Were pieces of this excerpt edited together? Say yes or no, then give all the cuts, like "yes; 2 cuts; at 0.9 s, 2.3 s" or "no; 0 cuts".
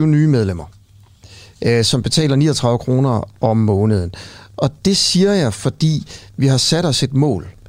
no; 0 cuts